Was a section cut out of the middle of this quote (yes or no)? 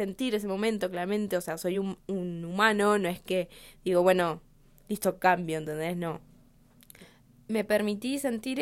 no